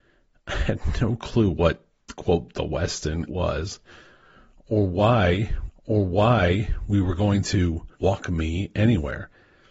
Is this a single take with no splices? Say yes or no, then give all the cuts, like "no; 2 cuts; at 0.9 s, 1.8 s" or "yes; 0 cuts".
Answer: no; 3 cuts; at 3.3 s, 5.7 s, 7.9 s